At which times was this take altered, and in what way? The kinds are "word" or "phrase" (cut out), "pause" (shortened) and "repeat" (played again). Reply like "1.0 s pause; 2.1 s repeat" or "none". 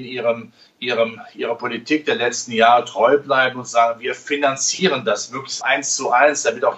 5.6 s word